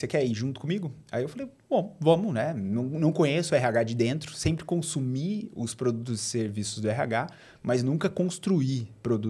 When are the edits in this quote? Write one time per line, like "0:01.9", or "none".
none

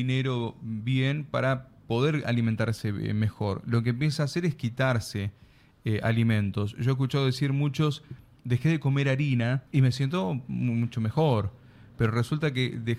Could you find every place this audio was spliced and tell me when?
0:09.7

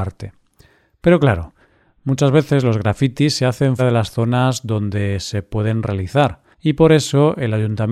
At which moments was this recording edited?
0:03.8
0:06.5

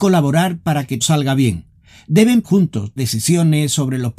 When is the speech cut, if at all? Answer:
0:01.0
0:02.4
0:03.0

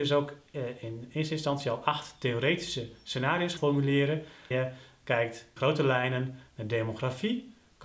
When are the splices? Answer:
0:03.6
0:04.5
0:05.6

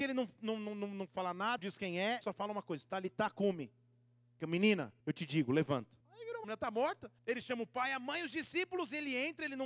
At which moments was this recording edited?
0:01.6
0:02.2
0:04.4
0:05.0
0:06.0
0:06.4
0:07.2

